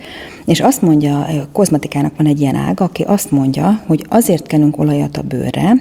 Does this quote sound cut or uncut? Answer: uncut